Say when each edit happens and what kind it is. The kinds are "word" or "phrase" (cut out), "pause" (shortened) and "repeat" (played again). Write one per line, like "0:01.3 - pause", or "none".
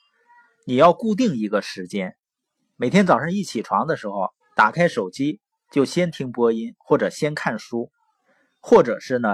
0:04.4 - pause